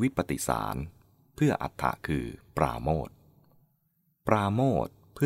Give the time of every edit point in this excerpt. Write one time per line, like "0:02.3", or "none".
none